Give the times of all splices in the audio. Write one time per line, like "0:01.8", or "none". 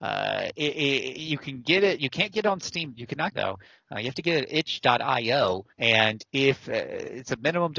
0:03.3
0:05.7